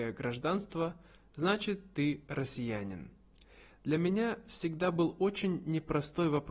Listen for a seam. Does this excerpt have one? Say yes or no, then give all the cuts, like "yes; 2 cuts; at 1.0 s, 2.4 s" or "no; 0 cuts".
no; 0 cuts